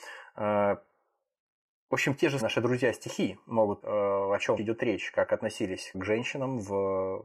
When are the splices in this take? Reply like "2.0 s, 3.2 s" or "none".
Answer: 2.4 s, 3.8 s, 4.6 s, 5.9 s